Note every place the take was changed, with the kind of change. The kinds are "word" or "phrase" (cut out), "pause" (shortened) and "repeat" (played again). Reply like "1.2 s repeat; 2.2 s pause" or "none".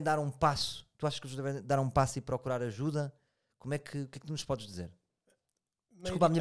none